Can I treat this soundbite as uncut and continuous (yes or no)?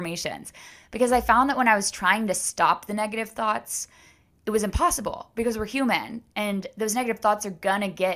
yes